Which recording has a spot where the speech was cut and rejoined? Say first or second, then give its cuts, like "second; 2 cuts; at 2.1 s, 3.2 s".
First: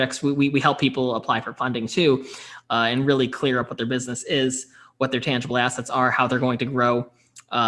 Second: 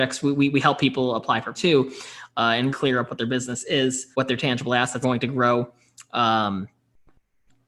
second; 4 cuts; at 1.5 s, 2.7 s, 4.1 s, 5.0 s